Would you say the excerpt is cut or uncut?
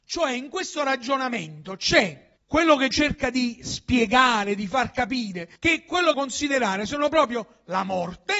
cut